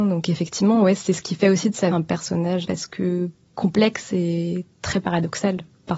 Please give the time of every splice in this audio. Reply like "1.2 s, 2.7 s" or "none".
1.9 s, 2.6 s, 4.7 s